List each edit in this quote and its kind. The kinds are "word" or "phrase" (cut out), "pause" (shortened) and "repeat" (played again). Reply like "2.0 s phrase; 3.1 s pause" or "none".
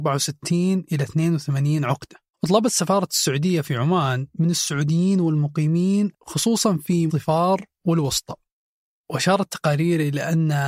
2.3 s pause; 6.1 s word; 7.1 s word